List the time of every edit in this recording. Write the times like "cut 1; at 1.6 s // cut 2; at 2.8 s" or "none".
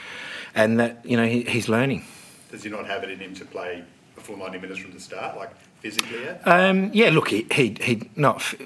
none